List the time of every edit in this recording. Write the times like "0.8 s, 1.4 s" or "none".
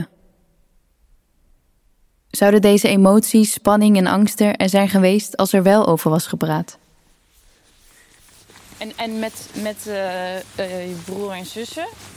none